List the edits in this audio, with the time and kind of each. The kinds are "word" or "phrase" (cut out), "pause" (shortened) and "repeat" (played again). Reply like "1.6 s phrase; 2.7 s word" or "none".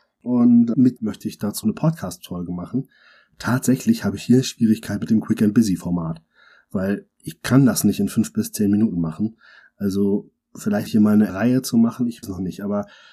1.0 s word; 1.6 s word; 10.9 s word; 11.3 s word; 12.2 s word